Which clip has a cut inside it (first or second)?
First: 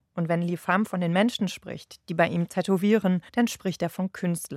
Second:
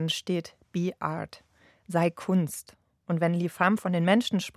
first